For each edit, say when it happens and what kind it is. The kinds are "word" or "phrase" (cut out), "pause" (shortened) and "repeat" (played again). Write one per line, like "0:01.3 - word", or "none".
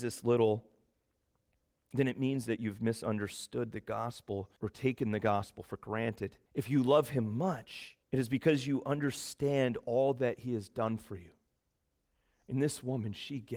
0:04.6 - pause
0:06.5 - pause
0:08.0 - pause